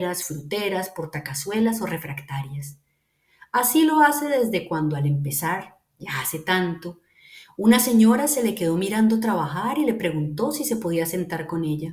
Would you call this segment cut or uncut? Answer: uncut